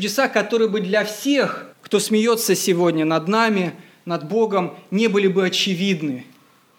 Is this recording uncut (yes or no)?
no